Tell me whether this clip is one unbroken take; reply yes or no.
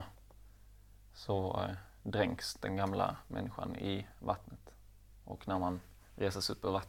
yes